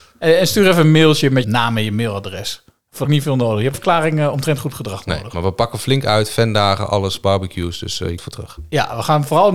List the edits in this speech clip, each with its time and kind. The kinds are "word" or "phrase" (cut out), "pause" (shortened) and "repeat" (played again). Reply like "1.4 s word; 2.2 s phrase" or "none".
1.4 s word; 3.0 s phrase; 3.7 s word; 8.2 s phrase